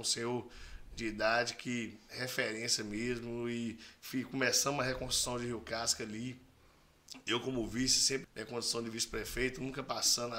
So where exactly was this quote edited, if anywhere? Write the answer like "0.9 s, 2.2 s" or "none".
8.2 s